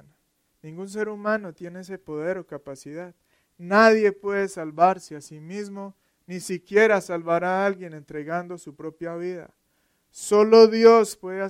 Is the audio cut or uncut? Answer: uncut